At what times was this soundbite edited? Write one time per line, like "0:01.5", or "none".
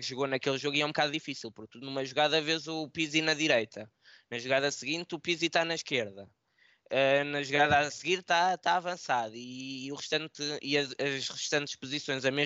none